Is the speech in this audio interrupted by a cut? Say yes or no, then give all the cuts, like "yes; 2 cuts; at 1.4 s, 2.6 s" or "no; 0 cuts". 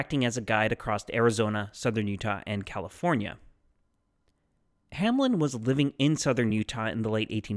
no; 0 cuts